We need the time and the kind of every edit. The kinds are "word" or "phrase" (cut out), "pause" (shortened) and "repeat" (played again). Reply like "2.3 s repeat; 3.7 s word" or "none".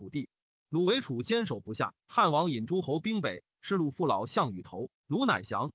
2.0 s pause